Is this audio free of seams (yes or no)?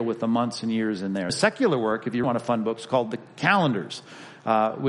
no